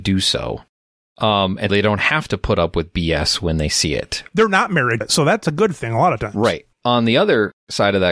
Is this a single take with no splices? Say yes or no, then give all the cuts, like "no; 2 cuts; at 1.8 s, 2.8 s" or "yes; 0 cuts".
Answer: no; 3 cuts; at 1.7 s, 5.0 s, 6.7 s